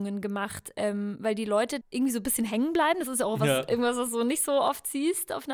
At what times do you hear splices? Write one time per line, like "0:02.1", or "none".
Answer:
0:01.8